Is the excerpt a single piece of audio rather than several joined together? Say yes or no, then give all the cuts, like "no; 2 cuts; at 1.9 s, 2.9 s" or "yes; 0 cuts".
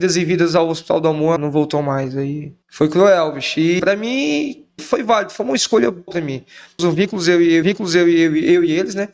no; 7 cuts; at 1.4 s, 2.6 s, 3.8 s, 4.8 s, 6.1 s, 6.8 s, 7.6 s